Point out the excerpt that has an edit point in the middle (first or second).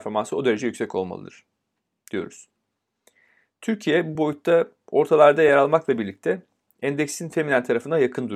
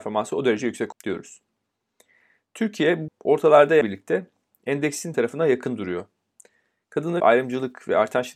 second